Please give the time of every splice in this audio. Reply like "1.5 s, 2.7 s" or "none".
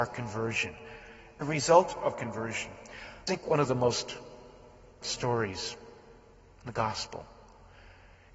1.4 s, 2.1 s, 3.3 s, 5.0 s